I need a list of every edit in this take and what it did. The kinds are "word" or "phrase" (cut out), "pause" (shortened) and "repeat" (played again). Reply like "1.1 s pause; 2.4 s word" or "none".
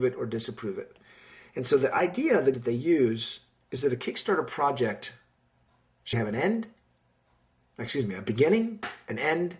2.5 s word; 6.1 s word